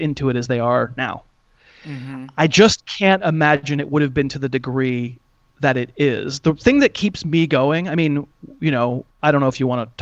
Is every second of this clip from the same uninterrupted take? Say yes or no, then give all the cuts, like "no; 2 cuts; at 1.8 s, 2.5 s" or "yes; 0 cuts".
yes; 0 cuts